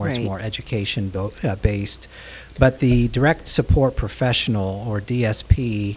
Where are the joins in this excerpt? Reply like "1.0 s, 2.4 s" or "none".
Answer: none

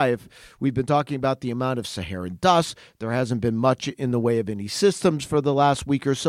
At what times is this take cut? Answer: none

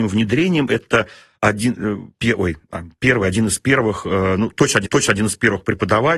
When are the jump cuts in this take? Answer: 4.8 s

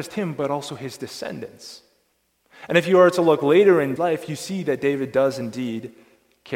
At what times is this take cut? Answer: 4.0 s

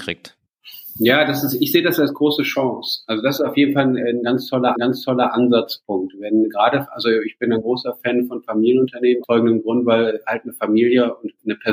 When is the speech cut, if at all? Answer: 4.8 s, 9.2 s

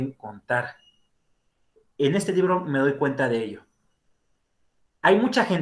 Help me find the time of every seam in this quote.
none

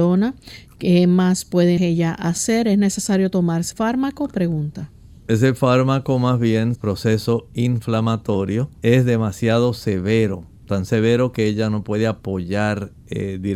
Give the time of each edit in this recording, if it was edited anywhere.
1.8 s, 3.7 s, 6.8 s, 8.8 s, 10.6 s

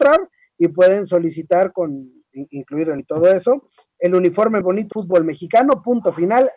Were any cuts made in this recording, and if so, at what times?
3.0 s, 4.6 s, 4.9 s

